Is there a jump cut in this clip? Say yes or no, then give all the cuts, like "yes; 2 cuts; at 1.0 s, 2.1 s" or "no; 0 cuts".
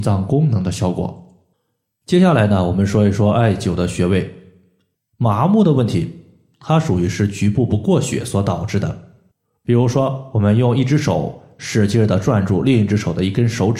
no; 0 cuts